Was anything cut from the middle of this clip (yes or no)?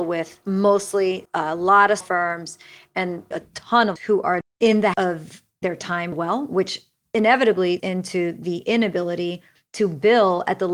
yes